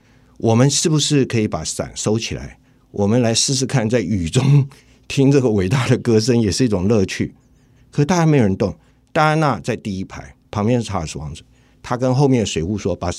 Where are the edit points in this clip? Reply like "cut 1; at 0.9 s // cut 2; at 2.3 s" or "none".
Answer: cut 1; at 10.4 s

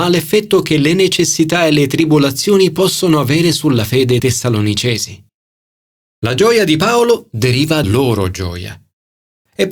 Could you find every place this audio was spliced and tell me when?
cut 1; at 4.2 s // cut 2; at 7.8 s

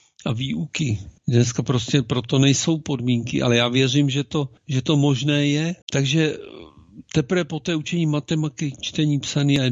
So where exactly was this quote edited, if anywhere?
cut 1; at 1.2 s // cut 2; at 4.6 s // cut 3; at 5.8 s

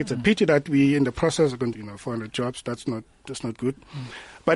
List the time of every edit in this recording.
cut 1; at 1.7 s

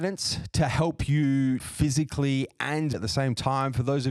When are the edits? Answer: cut 1; at 1.6 s // cut 2; at 2.9 s

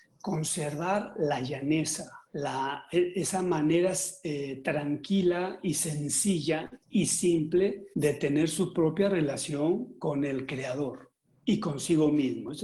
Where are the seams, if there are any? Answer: cut 1; at 2.3 s // cut 2; at 6.8 s // cut 3; at 7.9 s // cut 4; at 11.3 s

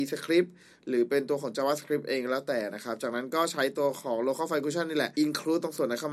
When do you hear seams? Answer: cut 1; at 5.1 s

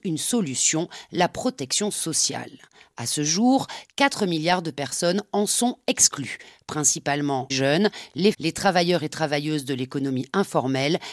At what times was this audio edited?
cut 1; at 7.5 s // cut 2; at 8.3 s

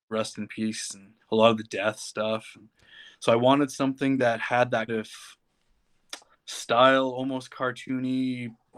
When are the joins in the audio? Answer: cut 1; at 1.2 s // cut 2; at 4.9 s // cut 3; at 6.3 s

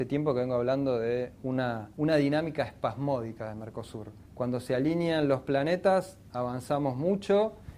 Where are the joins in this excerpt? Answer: cut 1; at 1.9 s // cut 2; at 4.3 s

